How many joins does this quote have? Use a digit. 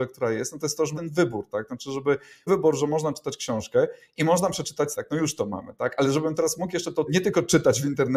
4